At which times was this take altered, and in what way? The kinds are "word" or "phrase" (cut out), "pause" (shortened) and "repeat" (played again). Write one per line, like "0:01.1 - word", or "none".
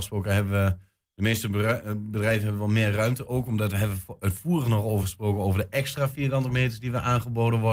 none